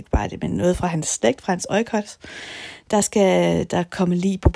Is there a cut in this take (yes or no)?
no